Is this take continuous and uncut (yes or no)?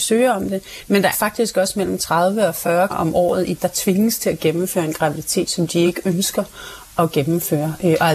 no